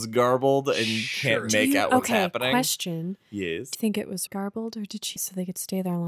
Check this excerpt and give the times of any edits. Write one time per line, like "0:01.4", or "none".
0:03.7
0:04.3
0:05.2

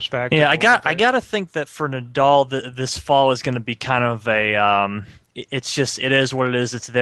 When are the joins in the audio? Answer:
none

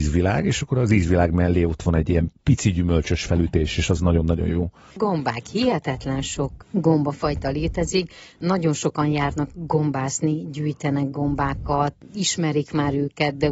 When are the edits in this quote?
none

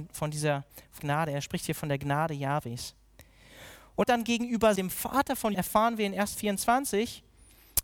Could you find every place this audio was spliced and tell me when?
0:01.0
0:04.0
0:04.8
0:05.5
0:06.3

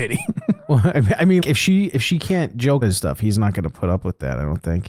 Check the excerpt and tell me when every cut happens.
0:01.4
0:02.8

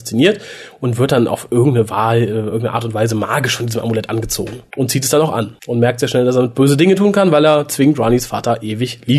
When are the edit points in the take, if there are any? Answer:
none

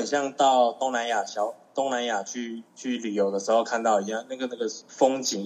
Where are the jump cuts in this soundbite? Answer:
0:02.7

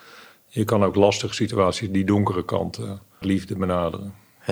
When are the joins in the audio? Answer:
0:03.2

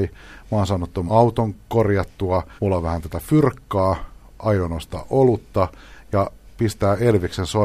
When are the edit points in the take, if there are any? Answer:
0:01.1
0:02.6

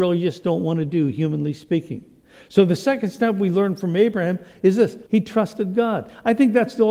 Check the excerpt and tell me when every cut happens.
0:05.1

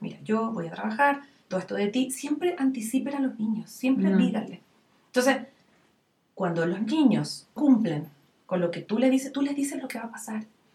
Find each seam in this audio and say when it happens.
0:01.5
0:07.6

